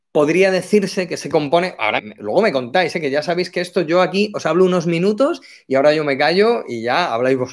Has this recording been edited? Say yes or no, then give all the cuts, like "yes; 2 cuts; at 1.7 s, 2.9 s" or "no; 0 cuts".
yes; 1 cut; at 2.0 s